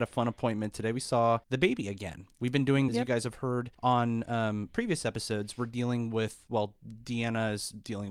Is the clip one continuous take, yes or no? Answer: no